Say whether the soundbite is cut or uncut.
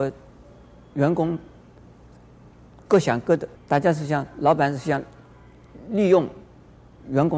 cut